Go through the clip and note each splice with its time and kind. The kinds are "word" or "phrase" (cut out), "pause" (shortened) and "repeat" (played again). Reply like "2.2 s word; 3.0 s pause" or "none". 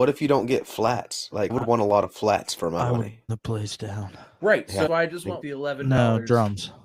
1.5 s word; 3.3 s word; 4.9 s word; 5.4 s word